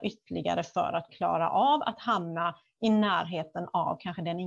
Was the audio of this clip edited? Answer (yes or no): yes